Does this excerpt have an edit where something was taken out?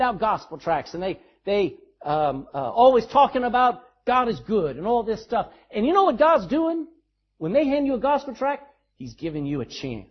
no; 0 cuts

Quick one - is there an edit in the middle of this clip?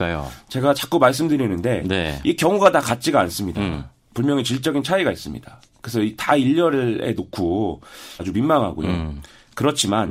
yes; 1 cut; at 8.2 s

